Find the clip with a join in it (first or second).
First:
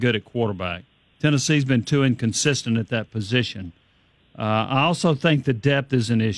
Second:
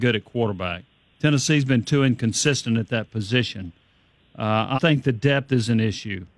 second